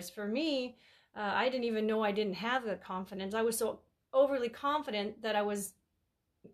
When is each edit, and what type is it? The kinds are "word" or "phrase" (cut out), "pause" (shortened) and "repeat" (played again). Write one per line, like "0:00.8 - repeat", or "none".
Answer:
none

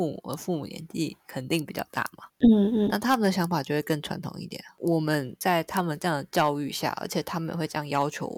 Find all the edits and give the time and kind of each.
none

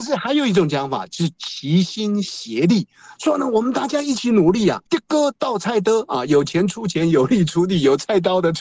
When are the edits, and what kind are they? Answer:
0:04.9 - pause

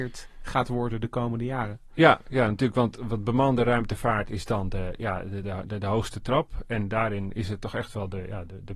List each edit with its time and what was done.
none

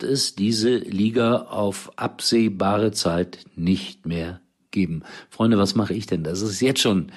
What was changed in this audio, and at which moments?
none

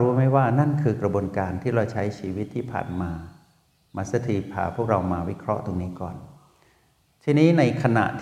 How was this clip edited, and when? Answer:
none

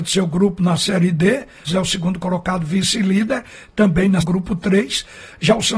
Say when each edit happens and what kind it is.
0:01.7 - word
0:04.2 - phrase

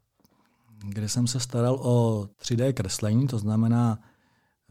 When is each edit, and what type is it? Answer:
0:02.3 - pause

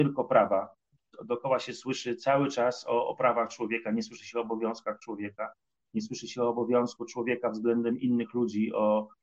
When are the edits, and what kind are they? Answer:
none

